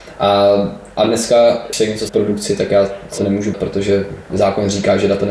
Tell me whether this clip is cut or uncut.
cut